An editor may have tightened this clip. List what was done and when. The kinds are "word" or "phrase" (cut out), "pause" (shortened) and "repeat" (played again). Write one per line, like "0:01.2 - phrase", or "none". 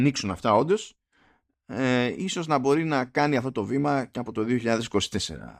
none

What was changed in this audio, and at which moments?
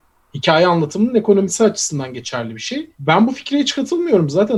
0:02.9 - pause

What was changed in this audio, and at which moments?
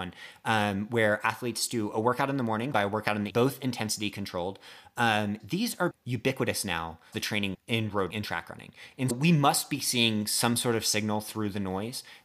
0:02.7 - word
0:03.3 - word
0:05.4 - word
0:05.9 - word
0:07.1 - word
0:07.5 - word
0:08.1 - word
0:09.1 - word

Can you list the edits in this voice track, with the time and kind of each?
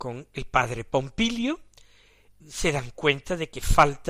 0:02.4 - word

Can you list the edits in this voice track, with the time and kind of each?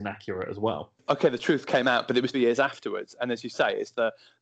0:02.3 - word

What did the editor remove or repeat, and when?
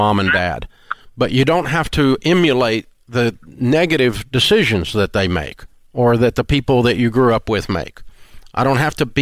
0:05.7 - pause

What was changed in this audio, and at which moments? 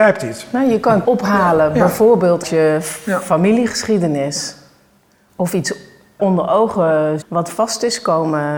0:01.0 - word
0:02.4 - word
0:06.2 - word
0:07.2 - word

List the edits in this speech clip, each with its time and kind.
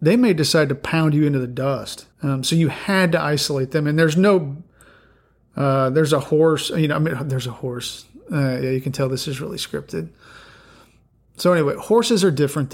0:02.1 - pause

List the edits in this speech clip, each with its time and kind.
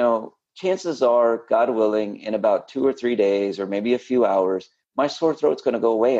none

